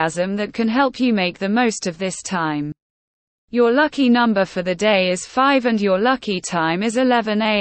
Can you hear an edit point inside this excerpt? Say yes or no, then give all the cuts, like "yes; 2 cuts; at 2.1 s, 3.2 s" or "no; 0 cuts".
no; 0 cuts